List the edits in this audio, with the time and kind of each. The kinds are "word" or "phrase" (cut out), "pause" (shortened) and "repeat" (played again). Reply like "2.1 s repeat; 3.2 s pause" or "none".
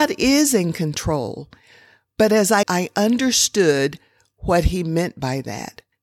2.6 s word